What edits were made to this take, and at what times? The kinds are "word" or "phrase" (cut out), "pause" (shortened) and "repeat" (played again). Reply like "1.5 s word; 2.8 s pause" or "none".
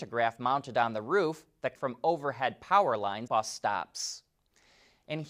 1.8 s phrase; 3.3 s word